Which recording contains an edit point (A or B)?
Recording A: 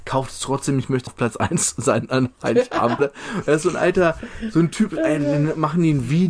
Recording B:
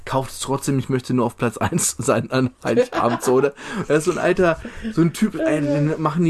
A